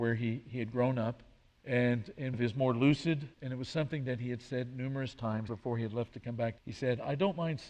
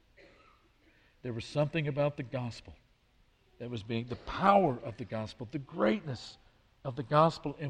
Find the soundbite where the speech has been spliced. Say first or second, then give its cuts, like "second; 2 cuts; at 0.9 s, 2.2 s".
first; 6 cuts; at 1.5 s, 2.3 s, 3.3 s, 5.5 s, 6.1 s, 6.6 s